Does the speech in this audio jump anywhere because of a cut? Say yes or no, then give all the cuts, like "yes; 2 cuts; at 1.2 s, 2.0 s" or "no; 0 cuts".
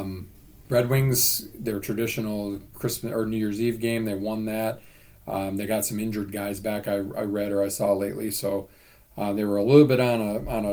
no; 0 cuts